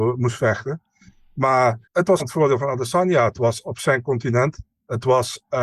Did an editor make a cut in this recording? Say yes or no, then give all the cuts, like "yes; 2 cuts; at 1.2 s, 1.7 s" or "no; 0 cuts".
yes; 2 cuts; at 1.8 s, 2.2 s